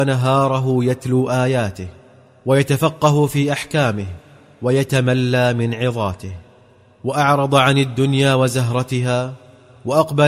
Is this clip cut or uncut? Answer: uncut